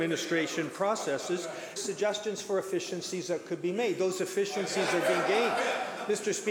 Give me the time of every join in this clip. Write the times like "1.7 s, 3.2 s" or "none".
1.8 s